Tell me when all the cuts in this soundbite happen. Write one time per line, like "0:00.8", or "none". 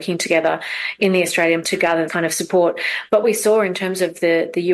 0:01.6
0:02.1
0:03.2